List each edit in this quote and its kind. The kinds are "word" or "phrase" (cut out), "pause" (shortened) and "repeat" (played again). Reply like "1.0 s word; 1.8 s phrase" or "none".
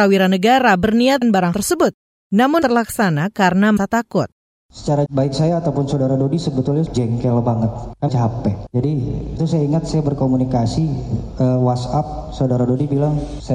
1.2 s word; 1.5 s word; 2.6 s word; 3.8 s word; 5.1 s word; 6.9 s word; 8.1 s word; 9.4 s word